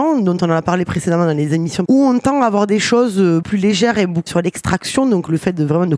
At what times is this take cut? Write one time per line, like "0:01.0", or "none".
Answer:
0:01.9
0:03.4
0:04.3